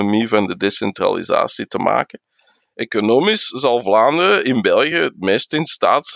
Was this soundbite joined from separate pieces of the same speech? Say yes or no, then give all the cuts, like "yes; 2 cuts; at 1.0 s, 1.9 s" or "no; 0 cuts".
no; 0 cuts